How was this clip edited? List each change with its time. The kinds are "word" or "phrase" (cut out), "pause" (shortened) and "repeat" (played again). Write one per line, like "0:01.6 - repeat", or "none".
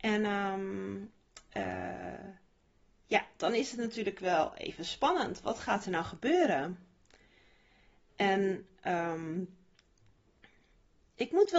none